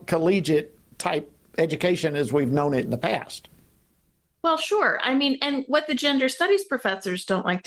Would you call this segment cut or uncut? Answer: uncut